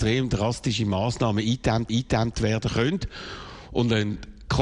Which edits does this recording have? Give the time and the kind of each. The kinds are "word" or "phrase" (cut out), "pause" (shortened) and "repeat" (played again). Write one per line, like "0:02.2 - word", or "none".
0:01.9 - repeat